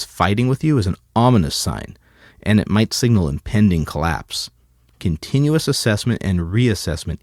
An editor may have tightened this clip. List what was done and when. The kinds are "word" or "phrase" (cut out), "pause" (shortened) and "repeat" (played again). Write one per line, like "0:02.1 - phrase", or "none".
none

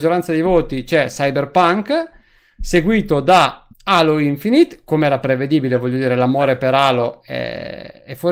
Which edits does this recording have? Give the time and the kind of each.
0:03.7 - pause

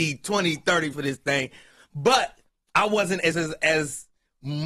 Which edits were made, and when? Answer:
0:00.9 - word
0:03.3 - word

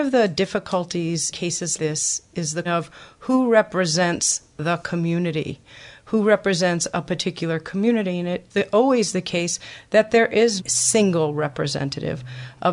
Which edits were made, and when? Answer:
0:01.3 - word
0:01.8 - word
0:02.6 - word
0:08.5 - word
0:10.6 - word

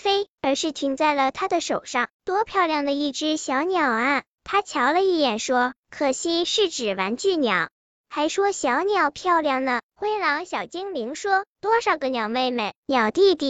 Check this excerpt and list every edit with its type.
0:02.1 - pause
0:07.7 - pause

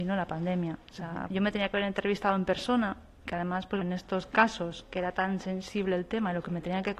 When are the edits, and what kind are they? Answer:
0:01.3 - word
0:03.8 - word

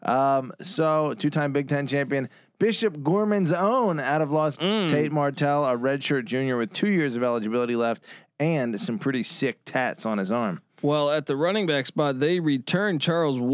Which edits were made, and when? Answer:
0:04.5 - word

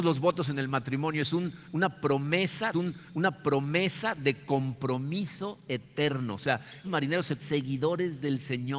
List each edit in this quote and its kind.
0:02.7 - repeat
0:06.8 - word
0:07.4 - phrase

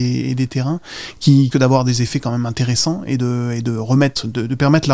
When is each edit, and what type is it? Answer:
0:01.5 - phrase

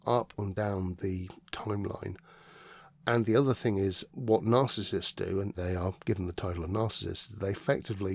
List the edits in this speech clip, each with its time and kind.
0:01.0 - word
0:01.5 - word
0:04.1 - word
0:05.5 - phrase

